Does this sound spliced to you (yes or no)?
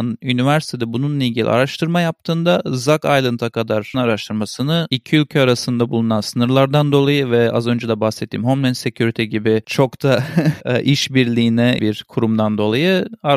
yes